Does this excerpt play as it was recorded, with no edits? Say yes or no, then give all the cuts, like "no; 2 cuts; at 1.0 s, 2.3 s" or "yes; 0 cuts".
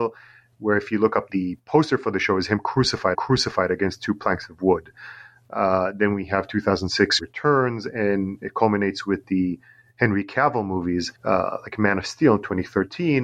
no; 5 cuts; at 1.3 s, 3.1 s, 7.2 s, 8.4 s, 11.2 s